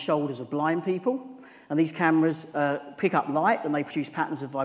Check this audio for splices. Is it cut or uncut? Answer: uncut